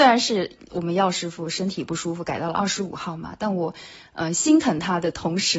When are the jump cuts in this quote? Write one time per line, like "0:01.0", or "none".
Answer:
none